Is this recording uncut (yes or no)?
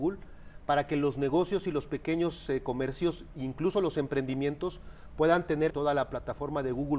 no